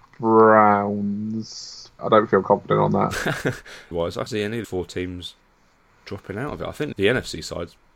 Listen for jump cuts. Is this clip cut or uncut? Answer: cut